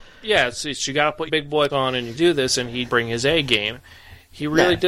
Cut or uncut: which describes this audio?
cut